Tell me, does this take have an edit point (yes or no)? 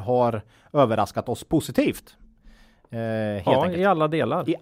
no